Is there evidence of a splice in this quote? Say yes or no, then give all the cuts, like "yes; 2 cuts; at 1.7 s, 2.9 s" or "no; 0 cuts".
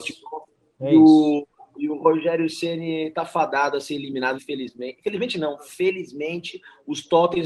yes; 1 cut; at 4.3 s